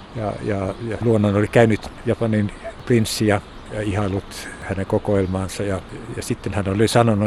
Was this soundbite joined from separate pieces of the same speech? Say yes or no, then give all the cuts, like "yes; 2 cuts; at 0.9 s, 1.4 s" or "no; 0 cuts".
yes; 1 cut; at 1.0 s